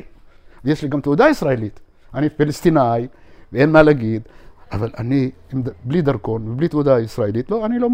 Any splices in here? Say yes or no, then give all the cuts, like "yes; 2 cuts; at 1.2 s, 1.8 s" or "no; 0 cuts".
no; 0 cuts